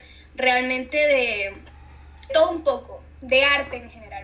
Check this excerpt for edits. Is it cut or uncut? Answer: cut